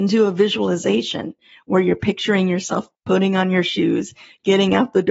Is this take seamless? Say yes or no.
yes